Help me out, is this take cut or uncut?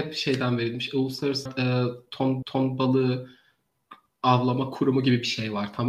cut